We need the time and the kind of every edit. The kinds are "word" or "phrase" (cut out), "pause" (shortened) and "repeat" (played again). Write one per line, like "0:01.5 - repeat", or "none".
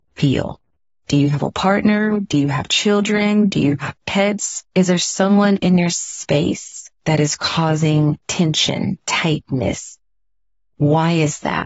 0:08.2 - pause

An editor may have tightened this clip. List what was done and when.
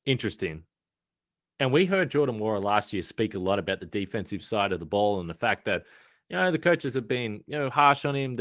none

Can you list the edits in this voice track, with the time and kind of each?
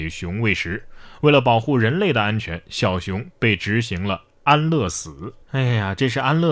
0:05.4 - pause

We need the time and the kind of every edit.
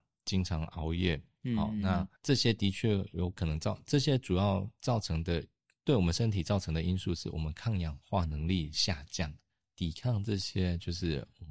0:02.2 - pause

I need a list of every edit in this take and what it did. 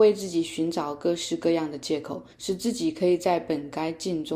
0:02.3 - pause

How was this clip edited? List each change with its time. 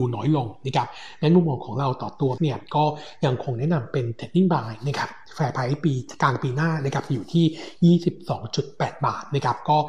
0:02.4 - word

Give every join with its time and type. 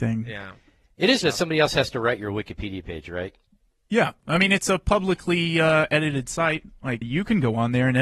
0:01.2 - word
0:07.0 - word

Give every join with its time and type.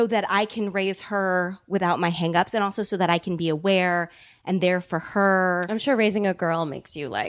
none

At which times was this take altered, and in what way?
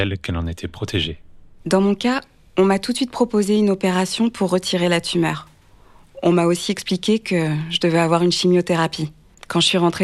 none

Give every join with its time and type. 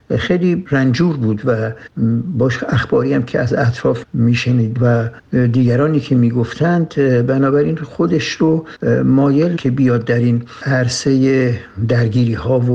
0:04.8 - word
0:09.6 - word

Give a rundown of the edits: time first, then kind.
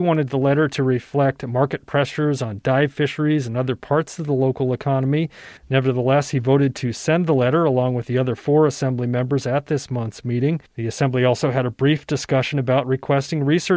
0:05.6 - pause
0:10.7 - pause

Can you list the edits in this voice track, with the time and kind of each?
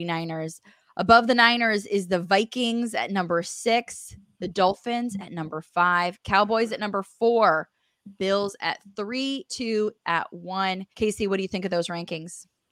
0:09.5 - phrase
0:10.0 - word
0:10.9 - pause

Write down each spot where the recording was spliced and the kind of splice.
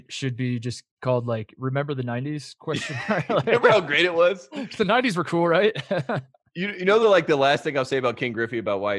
none

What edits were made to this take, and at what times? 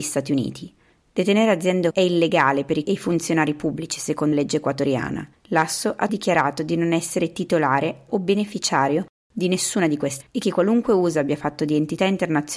0:01.9 - word
0:02.8 - word
0:04.3 - word
0:06.1 - word
0:08.1 - word
0:10.2 - word

